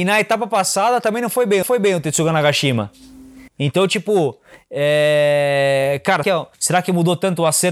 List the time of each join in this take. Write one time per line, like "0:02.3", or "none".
0:01.6
0:03.5
0:06.2
0:06.5